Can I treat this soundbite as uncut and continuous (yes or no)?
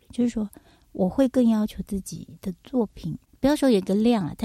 yes